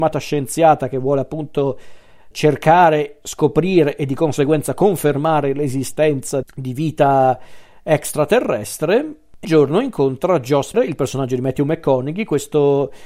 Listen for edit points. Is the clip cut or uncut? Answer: cut